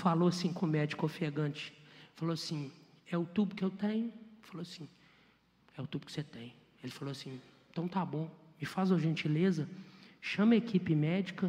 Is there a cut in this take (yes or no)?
no